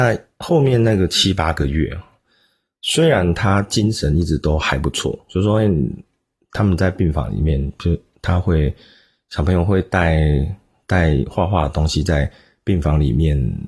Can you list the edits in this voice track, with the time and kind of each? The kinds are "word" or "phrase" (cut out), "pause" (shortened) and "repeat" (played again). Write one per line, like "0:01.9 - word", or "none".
none